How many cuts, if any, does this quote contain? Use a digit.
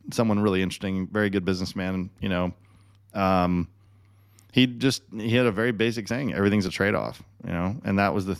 0